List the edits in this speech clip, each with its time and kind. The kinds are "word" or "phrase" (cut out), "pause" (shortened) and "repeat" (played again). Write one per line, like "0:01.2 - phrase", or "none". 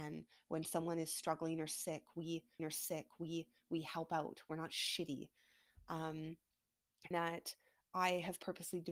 0:02.6 - repeat
0:07.1 - word